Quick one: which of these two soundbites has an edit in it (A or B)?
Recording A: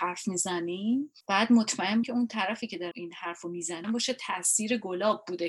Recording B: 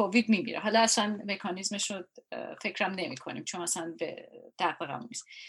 A